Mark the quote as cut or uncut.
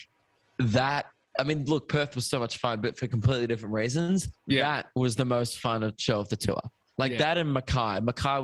uncut